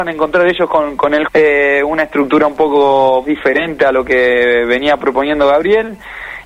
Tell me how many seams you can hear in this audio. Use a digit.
2